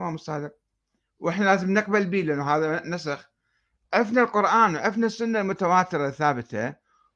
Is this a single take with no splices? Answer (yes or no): yes